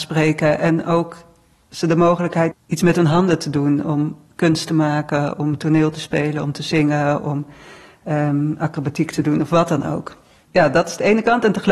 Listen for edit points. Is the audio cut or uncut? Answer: cut